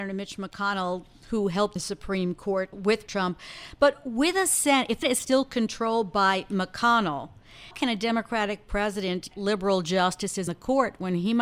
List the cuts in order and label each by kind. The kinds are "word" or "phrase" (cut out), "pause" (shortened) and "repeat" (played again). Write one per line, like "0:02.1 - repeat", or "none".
0:01.8 - word
0:02.7 - word
0:03.1 - word
0:05.0 - word
0:07.7 - word
0:09.3 - word
0:10.5 - word